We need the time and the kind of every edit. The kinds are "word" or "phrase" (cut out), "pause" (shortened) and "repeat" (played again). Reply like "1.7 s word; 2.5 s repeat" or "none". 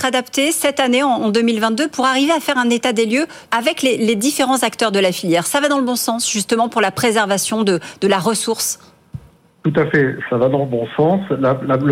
3.5 s pause

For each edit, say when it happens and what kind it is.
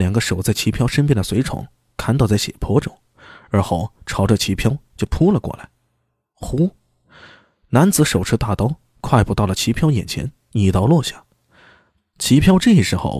none

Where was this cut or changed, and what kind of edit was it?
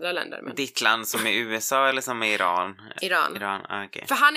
none

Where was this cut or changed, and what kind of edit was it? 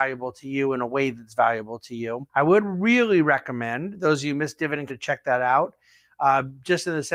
2.3 s pause; 4.9 s phrase

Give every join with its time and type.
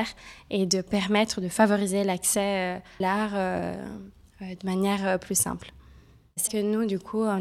3.0 s word; 6.5 s word

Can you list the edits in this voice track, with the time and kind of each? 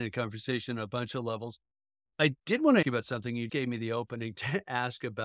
2.4 s pause; 2.8 s word; 3.5 s word

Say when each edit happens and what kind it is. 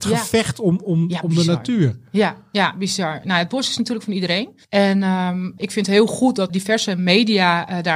5.6 s word; 6.5 s word

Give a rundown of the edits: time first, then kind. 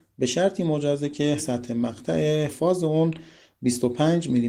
1.4 s word; 2.5 s word

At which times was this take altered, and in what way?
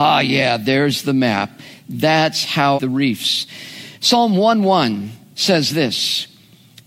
2.8 s phrase; 3.9 s pause

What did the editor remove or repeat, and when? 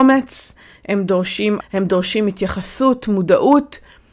1.6 s word

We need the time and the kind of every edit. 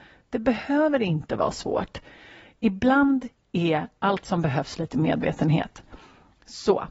none

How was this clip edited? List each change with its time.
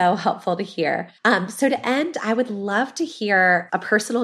1.2 s pause

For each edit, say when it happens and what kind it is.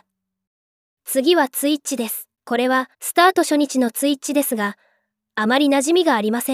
2.3 s pause; 2.9 s pause

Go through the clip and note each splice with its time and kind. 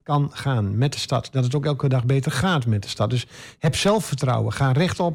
none

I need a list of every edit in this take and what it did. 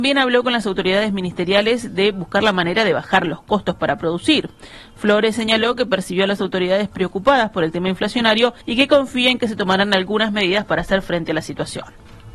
8.6 s pause

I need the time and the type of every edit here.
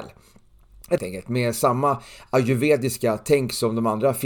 1.0 s phrase

